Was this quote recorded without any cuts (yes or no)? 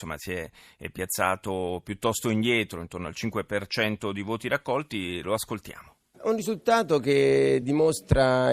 yes